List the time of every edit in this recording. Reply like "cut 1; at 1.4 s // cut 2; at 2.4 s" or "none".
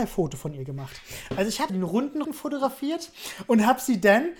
cut 1; at 1.7 s // cut 2; at 2.2 s

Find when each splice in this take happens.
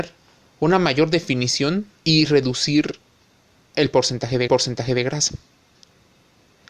cut 1; at 2.0 s // cut 2; at 4.5 s

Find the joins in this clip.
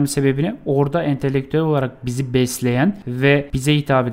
none

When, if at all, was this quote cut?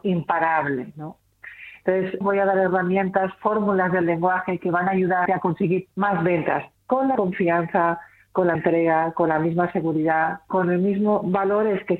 cut 1; at 2.2 s // cut 2; at 5.3 s // cut 3; at 5.9 s // cut 4; at 7.1 s // cut 5; at 8.5 s

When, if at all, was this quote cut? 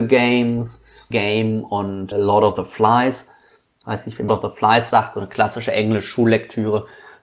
cut 1; at 1.1 s // cut 2; at 2.1 s // cut 3; at 4.3 s // cut 4; at 4.9 s

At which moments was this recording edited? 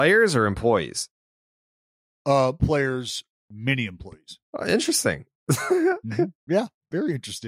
cut 1; at 2.6 s // cut 2; at 4.4 s // cut 3; at 6.4 s

